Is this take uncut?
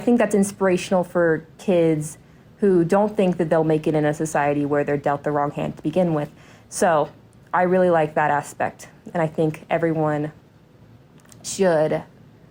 yes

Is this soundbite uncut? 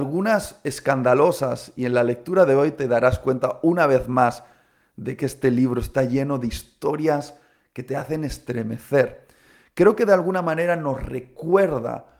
yes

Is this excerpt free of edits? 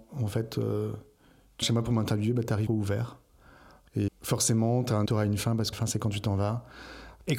no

